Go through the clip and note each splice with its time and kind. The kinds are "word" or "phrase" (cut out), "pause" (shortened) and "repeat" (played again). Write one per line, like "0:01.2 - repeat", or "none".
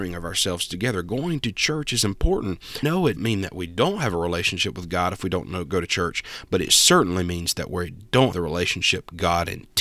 0:02.8 - word
0:03.2 - word
0:08.3 - word